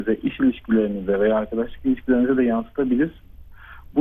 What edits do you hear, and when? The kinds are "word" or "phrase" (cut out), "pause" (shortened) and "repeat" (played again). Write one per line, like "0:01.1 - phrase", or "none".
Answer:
none